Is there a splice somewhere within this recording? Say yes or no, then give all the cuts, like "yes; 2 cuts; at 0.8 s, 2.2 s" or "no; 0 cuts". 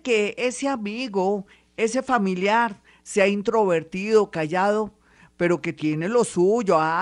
no; 0 cuts